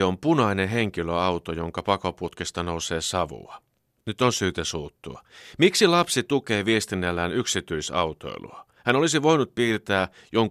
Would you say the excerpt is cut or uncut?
uncut